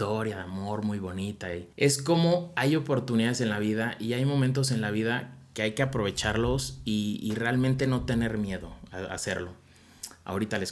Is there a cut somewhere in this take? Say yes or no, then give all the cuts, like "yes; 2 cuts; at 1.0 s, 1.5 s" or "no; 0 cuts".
yes; 1 cut; at 1.7 s